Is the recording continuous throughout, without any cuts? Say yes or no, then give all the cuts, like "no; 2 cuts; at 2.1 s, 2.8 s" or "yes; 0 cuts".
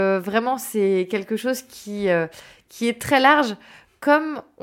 yes; 0 cuts